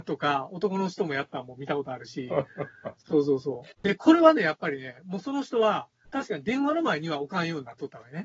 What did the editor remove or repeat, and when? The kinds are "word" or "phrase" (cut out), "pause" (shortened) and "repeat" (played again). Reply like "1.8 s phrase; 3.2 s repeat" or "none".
3.0 s pause; 3.7 s pause; 6.1 s pause